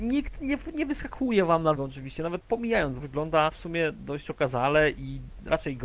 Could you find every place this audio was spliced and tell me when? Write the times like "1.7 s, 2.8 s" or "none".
1.8 s, 2.4 s, 3.0 s, 3.5 s